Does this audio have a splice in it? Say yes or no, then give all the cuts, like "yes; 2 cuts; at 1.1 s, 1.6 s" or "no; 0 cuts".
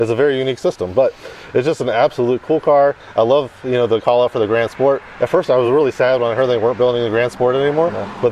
no; 0 cuts